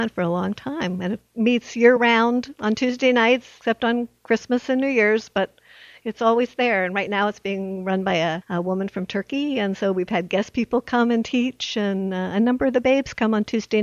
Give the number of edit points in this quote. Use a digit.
0